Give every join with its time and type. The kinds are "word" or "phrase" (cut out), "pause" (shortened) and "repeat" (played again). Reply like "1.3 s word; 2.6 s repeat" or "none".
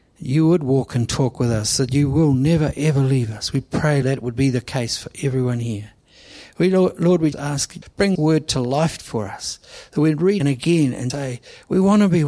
4.0 s word; 7.3 s word; 7.8 s word; 8.1 s word; 10.4 s phrase; 11.1 s word